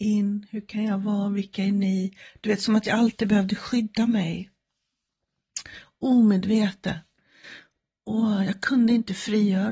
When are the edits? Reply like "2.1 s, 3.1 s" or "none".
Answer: none